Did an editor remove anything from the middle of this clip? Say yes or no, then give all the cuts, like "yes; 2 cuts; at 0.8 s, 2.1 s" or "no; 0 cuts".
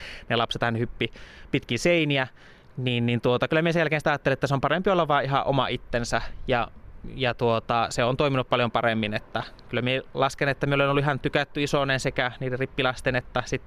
no; 0 cuts